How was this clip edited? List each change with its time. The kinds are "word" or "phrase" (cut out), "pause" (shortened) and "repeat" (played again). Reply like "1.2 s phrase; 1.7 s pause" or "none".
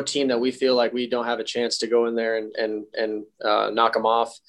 2.9 s repeat